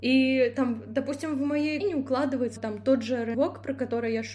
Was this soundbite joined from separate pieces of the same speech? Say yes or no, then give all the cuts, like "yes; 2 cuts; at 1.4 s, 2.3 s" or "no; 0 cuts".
yes; 3 cuts; at 1.8 s, 2.6 s, 3.3 s